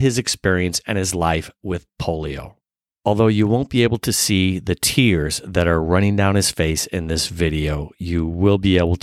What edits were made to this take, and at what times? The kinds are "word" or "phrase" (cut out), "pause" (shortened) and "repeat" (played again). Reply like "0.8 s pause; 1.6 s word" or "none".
none